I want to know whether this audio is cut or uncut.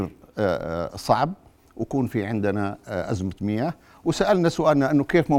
uncut